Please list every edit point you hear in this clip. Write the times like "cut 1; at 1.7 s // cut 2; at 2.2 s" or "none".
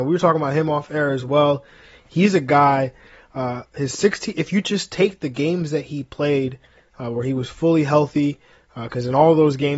none